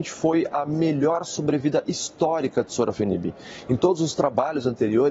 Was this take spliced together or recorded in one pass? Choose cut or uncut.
uncut